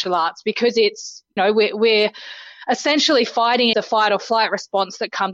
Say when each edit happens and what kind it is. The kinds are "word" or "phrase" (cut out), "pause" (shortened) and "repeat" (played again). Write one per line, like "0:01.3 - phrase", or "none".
0:01.4 - word
0:03.7 - word